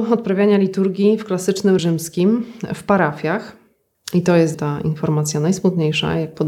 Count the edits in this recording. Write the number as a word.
three